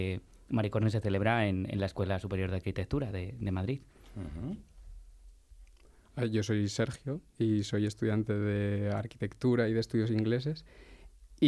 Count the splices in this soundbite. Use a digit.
0